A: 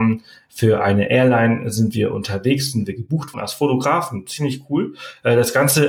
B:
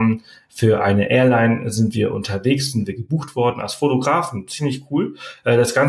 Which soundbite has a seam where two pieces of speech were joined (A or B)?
A